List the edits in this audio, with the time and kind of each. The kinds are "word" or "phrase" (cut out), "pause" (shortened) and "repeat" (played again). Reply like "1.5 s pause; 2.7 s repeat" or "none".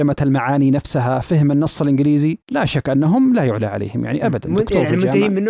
2.4 s pause